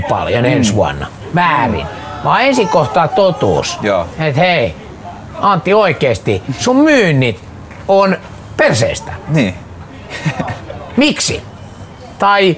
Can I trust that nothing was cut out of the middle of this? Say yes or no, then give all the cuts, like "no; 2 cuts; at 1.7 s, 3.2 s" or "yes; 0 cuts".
yes; 0 cuts